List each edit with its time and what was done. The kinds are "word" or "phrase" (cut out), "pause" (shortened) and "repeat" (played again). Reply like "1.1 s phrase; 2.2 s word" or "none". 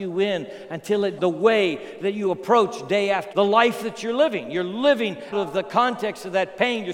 1.2 s word; 3.3 s word; 5.3 s word